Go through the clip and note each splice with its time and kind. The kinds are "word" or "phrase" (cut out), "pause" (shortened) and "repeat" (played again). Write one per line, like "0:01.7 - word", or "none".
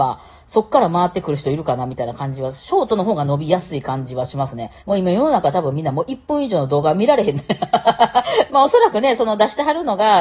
0:04.8 - pause
0:08.5 - word